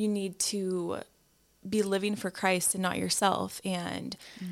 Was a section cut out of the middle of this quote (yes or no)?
no